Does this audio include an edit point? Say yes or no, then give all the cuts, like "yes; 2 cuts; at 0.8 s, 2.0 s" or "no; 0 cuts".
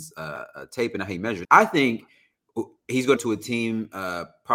yes; 2 cuts; at 1.4 s, 3.2 s